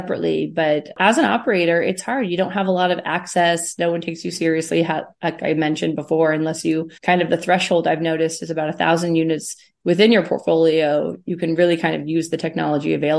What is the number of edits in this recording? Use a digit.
1